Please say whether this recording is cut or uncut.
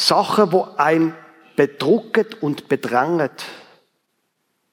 uncut